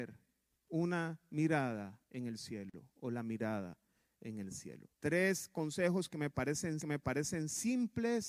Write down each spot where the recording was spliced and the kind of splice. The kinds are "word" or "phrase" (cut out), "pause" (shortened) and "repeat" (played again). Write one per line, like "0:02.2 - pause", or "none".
0:02.0 - pause
0:04.9 - pause
0:06.8 - repeat